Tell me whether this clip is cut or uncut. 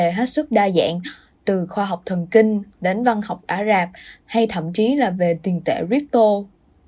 uncut